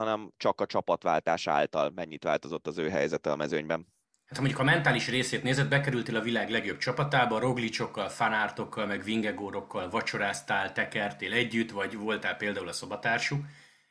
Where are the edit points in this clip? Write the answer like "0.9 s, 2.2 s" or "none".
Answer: 4.0 s